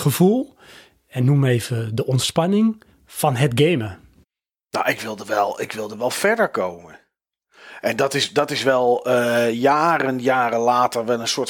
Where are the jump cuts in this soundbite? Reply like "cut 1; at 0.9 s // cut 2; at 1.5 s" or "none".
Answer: cut 1; at 2.9 s // cut 2; at 4.2 s